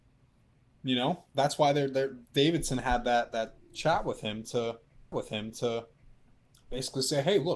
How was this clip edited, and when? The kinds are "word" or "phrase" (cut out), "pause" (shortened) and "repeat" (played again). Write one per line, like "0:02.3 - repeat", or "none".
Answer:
0:05.1 - repeat